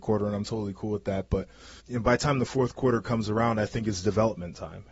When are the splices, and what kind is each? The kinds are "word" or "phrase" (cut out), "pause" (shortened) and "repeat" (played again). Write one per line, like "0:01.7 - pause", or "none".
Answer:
0:01.8 - word

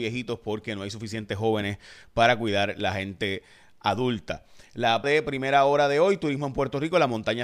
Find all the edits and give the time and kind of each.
0:05.0 - word

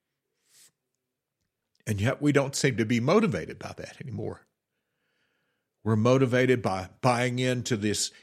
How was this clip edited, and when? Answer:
none

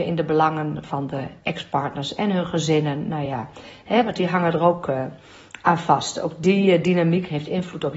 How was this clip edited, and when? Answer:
none

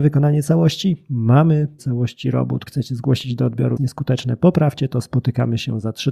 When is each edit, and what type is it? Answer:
0:01.8 - word
0:02.7 - word
0:03.8 - phrase

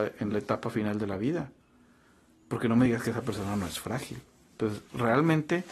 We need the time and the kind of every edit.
none

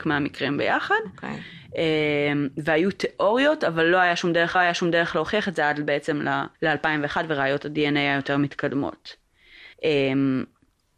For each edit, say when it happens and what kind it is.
0:04.5 - repeat
0:06.5 - pause
0:09.7 - pause

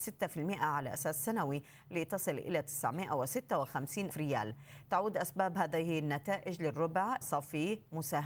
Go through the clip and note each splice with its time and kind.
0:04.1 - word
0:07.2 - phrase

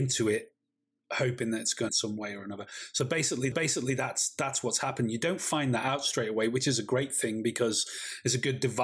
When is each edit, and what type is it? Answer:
0:01.9 - phrase
0:03.5 - repeat

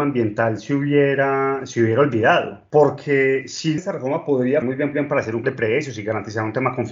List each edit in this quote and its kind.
0:03.8 - word
0:04.6 - word
0:04.9 - repeat
0:05.4 - word

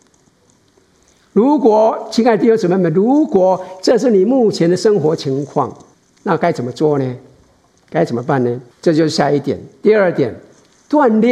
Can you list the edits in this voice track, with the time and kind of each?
0:05.9 - pause
0:08.7 - pause

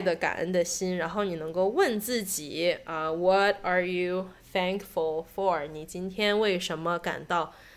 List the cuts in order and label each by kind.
none

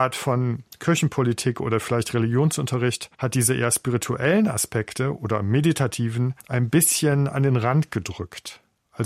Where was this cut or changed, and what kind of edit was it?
0:03.1 - pause
0:06.4 - pause

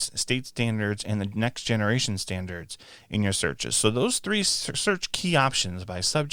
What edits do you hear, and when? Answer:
none

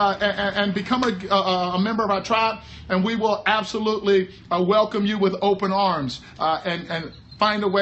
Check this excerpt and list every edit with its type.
0:06.9 - word

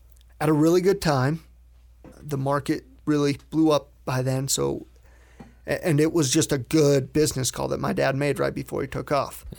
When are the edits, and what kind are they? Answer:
0:02.1 - pause

